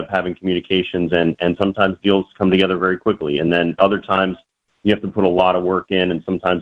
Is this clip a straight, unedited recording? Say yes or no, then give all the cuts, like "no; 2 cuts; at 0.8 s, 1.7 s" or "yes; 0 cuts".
yes; 0 cuts